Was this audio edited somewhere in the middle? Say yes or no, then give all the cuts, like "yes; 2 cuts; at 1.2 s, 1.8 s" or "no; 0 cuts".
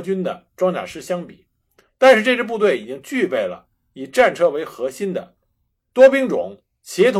no; 0 cuts